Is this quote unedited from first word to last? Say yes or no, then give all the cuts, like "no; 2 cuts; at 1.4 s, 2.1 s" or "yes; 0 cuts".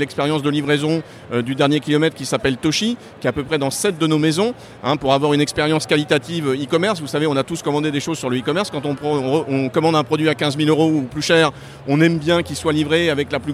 yes; 0 cuts